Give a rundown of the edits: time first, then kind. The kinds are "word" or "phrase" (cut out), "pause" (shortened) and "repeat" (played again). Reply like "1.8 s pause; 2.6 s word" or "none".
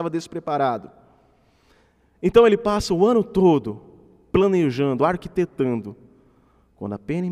none